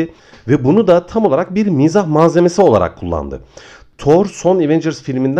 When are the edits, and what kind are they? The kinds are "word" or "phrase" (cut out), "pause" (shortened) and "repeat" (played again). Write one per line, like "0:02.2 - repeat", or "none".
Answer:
none